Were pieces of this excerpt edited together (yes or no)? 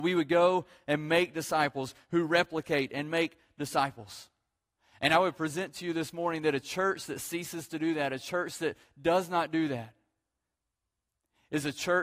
no